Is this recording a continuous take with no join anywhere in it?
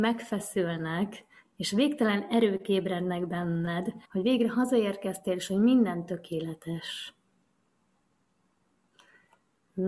no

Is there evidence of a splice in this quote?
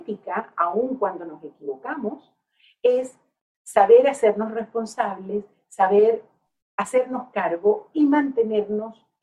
no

